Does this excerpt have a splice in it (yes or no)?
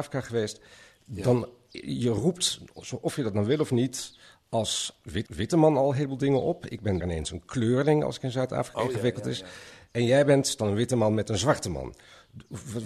yes